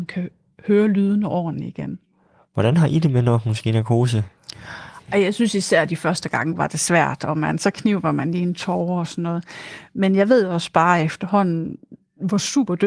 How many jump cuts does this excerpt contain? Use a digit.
0